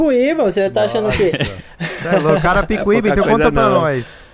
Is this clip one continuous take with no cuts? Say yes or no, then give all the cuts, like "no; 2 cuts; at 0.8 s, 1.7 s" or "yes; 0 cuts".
yes; 0 cuts